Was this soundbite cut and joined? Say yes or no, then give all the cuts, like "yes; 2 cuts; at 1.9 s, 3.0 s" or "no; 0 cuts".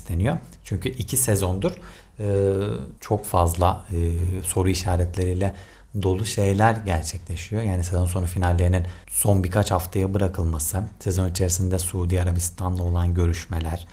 yes; 2 cuts; at 3.0 s, 9.0 s